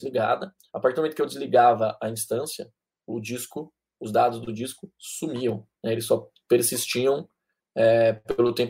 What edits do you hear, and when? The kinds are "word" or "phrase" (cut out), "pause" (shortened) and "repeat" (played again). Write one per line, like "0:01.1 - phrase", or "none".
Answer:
0:05.7 - pause